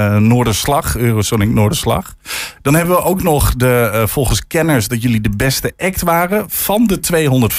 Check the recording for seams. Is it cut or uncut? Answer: uncut